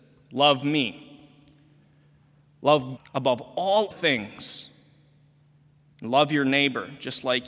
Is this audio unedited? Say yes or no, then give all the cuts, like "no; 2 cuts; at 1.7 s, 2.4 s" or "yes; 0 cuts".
no; 2 cuts; at 3.0 s, 3.9 s